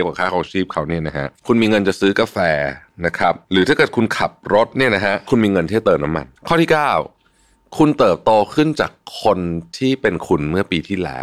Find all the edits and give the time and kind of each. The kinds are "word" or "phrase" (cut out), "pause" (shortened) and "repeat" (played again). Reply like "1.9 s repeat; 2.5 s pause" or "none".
3.4 s pause; 6.4 s pause